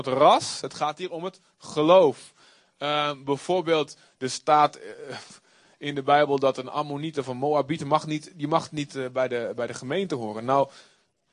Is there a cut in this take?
no; 0 cuts

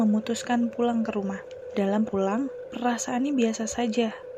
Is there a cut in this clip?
yes; 1 cut; at 2.1 s

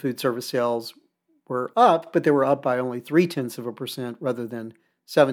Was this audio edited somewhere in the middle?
no; 0 cuts

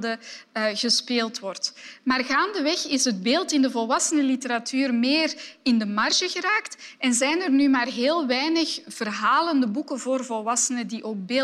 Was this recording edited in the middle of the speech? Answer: no; 0 cuts

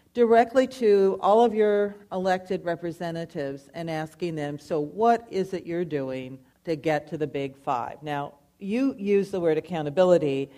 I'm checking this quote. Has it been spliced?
yes; 1 cut; at 6.5 s

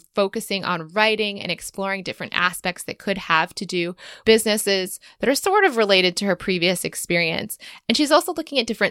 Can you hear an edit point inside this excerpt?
yes; 1 cut; at 4.2 s

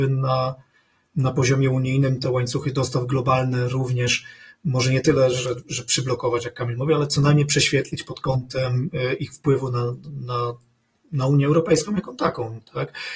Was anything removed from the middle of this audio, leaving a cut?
no; 0 cuts

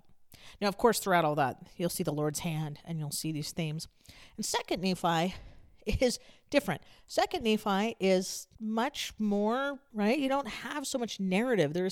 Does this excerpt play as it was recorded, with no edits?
no; 2 cuts; at 8.5 s, 9.9 s

